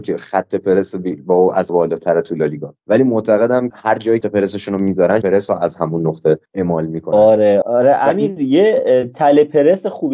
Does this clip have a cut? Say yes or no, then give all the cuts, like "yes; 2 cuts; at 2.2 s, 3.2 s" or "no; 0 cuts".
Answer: yes; 7 cuts; at 1.7 s, 2.8 s, 3.7 s, 4.2 s, 5.2 s, 6.5 s, 7.6 s